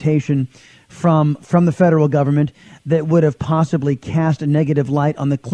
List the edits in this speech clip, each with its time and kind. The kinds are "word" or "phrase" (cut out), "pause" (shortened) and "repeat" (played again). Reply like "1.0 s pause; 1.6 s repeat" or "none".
1.4 s word